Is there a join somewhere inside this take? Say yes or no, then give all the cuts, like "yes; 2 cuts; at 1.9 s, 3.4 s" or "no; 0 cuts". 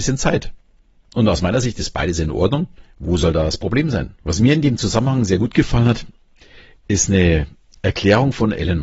yes; 1 cut; at 4.2 s